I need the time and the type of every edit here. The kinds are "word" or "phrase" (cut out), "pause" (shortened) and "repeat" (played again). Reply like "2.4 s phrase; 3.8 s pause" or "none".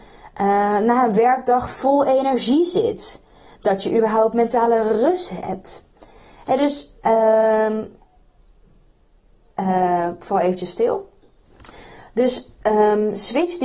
none